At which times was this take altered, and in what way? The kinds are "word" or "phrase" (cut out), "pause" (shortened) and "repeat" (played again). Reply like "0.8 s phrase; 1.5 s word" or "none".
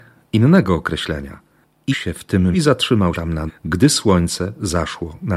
1.9 s word; 2.5 s word; 3.1 s word; 3.5 s word